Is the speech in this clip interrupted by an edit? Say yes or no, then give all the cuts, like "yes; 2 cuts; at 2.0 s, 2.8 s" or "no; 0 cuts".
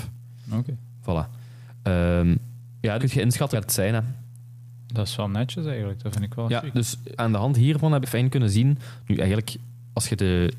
yes; 4 cuts; at 3.0 s, 3.5 s, 7.2 s, 8.0 s